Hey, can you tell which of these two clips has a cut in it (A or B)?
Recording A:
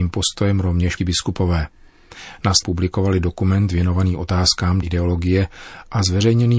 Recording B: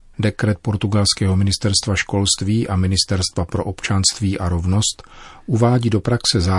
A